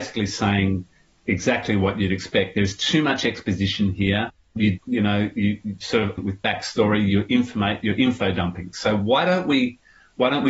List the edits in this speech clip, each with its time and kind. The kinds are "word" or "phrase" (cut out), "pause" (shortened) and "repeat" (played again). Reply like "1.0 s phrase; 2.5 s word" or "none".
4.8 s word; 6.2 s word